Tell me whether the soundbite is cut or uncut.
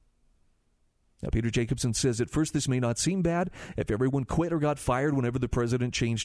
uncut